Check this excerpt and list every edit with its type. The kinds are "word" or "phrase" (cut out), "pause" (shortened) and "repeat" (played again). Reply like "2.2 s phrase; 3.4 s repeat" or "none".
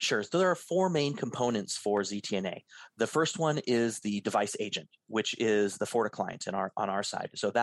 none